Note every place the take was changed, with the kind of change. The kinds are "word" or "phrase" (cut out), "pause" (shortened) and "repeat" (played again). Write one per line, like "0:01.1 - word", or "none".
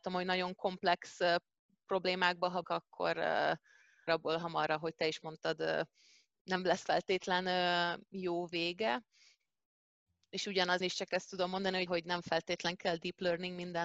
0:02.6 - word
0:04.1 - word
0:10.8 - word
0:11.9 - word